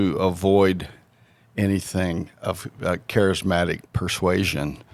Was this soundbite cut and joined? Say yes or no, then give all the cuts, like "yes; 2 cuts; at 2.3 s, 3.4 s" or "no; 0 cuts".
yes; 1 cut; at 3.9 s